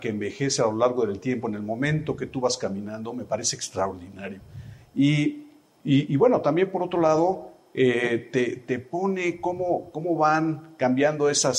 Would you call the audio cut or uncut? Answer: uncut